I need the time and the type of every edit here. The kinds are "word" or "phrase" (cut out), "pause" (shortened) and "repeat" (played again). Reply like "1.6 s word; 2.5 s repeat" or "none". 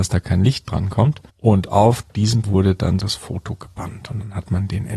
1.3 s pause; 2.4 s word; 3.0 s word